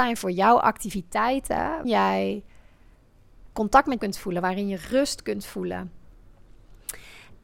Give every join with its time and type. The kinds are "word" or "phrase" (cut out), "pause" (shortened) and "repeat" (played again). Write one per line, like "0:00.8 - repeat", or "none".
0:01.8 - word
0:03.5 - word
0:04.0 - word